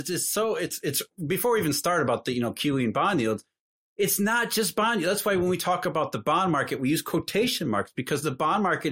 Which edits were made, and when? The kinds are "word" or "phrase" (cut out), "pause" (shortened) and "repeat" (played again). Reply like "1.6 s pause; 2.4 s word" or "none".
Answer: none